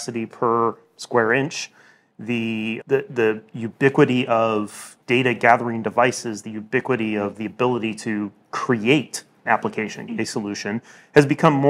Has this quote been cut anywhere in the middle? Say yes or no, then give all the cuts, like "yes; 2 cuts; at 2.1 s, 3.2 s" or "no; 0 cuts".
yes; 4 cuts; at 2.8 s, 5.0 s, 9.5 s, 10.1 s